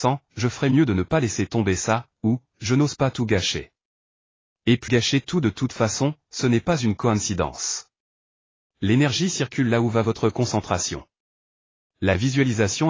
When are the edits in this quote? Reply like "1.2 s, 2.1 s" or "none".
4.9 s